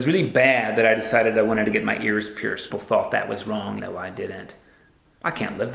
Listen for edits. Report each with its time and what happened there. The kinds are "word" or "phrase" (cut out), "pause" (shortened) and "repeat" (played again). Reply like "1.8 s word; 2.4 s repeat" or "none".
2.7 s phrase; 3.8 s word